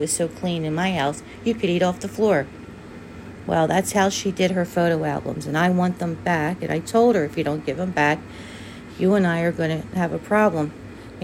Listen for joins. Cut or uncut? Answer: uncut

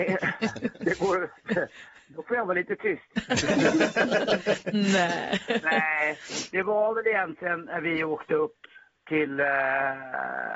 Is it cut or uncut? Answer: cut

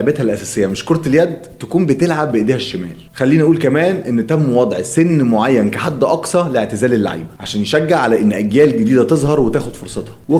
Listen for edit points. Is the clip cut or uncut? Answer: uncut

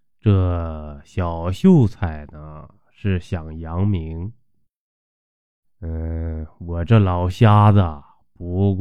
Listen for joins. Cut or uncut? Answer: uncut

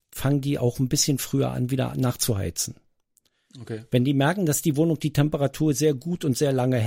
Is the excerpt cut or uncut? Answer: uncut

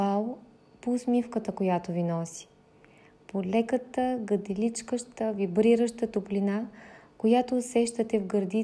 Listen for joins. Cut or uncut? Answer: uncut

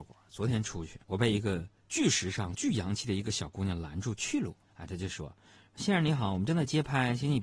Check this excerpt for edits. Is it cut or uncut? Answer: cut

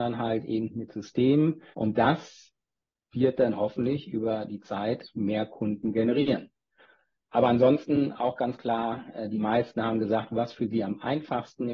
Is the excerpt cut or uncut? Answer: cut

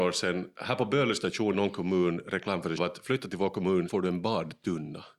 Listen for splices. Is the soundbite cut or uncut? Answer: cut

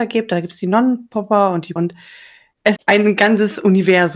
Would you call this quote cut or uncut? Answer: cut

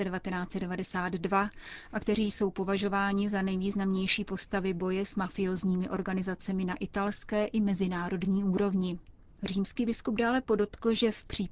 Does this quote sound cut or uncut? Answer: uncut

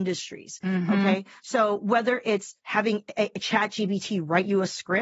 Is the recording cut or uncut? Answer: uncut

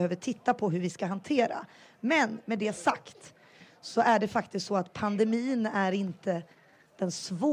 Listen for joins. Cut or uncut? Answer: uncut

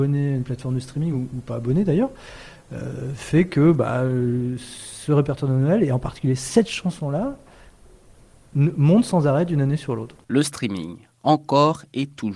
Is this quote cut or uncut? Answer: uncut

